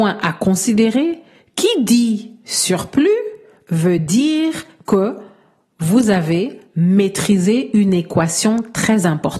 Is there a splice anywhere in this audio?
no; 0 cuts

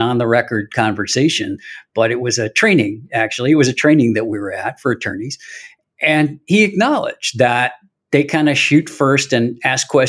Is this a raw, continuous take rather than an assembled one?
yes; 0 cuts

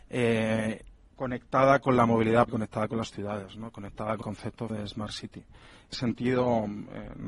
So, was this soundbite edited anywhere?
yes; 5 cuts; at 1.0 s, 2.5 s, 4.2 s, 4.7 s, 5.9 s

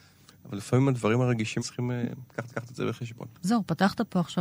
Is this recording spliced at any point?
yes; 3 cuts; at 1.6 s, 2.5 s, 3.3 s

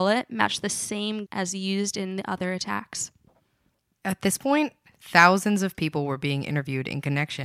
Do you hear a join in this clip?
yes; 1 cut; at 1.3 s

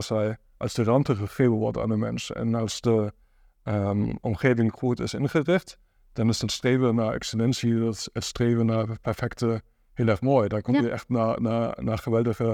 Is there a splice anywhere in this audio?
no; 0 cuts

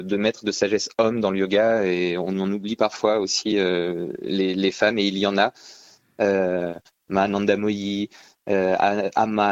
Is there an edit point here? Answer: no; 0 cuts

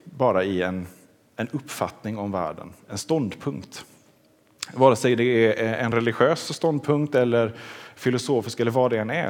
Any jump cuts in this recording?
no; 0 cuts

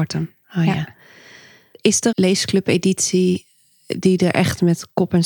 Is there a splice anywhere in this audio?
yes; 1 cut; at 2.1 s

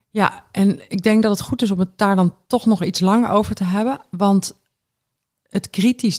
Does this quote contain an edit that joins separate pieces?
no; 0 cuts

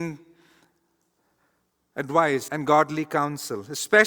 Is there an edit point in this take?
yes; 1 cut; at 2.5 s

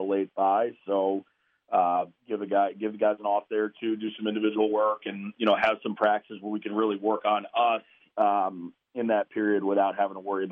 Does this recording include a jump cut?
no; 0 cuts

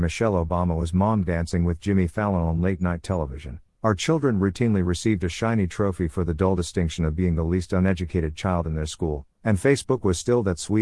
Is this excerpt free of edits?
yes; 0 cuts

